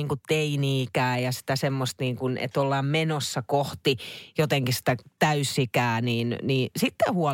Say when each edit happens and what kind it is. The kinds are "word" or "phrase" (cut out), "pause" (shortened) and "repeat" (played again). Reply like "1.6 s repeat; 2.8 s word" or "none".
none